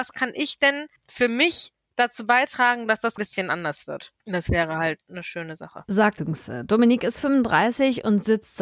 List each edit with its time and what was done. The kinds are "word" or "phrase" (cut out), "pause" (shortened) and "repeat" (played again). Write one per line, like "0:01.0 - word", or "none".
0:01.0 - pause
0:03.2 - phrase
0:04.2 - pause
0:06.2 - phrase